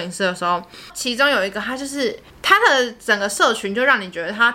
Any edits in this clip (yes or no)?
yes